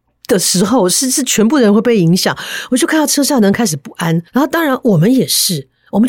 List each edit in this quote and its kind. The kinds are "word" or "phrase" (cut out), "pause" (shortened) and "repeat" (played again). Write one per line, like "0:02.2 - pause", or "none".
0:04.3 - pause